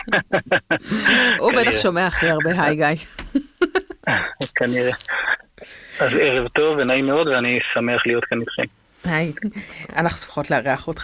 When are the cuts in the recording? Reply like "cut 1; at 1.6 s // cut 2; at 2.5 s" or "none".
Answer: none